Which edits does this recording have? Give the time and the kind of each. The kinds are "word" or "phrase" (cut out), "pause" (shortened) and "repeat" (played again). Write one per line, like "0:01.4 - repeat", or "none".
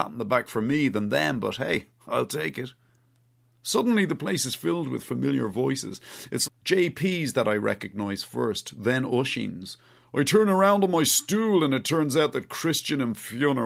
0:06.5 - word